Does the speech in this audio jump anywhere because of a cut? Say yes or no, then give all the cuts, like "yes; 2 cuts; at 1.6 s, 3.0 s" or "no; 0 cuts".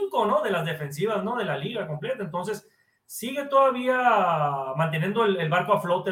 no; 0 cuts